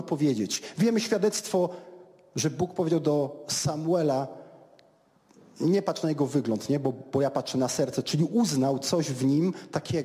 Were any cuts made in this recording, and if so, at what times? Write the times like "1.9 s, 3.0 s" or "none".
none